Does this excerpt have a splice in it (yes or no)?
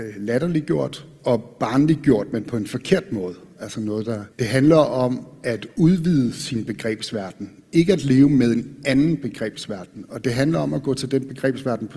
yes